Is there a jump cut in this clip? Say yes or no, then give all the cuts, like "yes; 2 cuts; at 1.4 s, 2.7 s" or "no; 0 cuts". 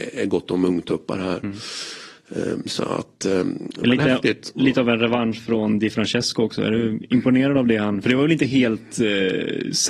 no; 0 cuts